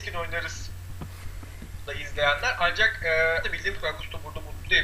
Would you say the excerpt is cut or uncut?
cut